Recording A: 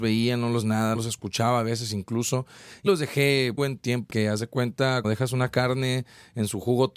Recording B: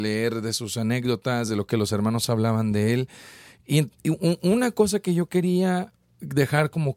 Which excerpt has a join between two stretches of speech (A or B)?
A